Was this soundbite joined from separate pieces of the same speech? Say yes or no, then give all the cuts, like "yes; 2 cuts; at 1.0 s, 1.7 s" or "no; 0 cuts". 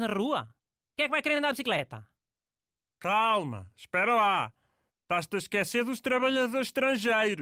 no; 0 cuts